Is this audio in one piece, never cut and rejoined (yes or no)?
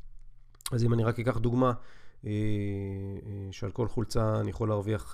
yes